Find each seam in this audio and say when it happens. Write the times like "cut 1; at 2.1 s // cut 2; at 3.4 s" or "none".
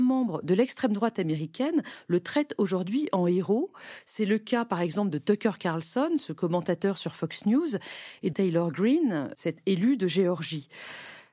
cut 1; at 8.3 s